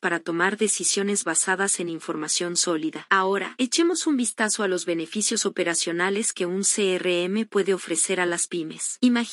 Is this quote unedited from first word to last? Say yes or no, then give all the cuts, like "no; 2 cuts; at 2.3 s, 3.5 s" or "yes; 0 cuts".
yes; 0 cuts